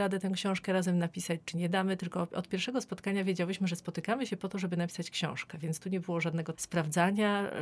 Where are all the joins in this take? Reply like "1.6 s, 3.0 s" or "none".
6.5 s